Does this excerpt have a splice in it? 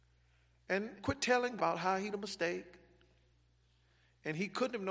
yes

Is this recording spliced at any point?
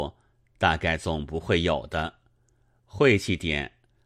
no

